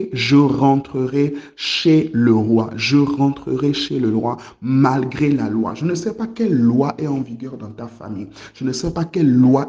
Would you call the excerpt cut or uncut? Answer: uncut